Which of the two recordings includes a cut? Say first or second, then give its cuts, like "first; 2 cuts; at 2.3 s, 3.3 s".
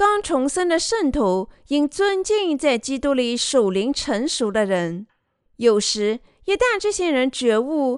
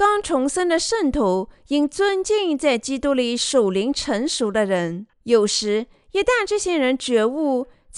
second; 1 cut; at 5.1 s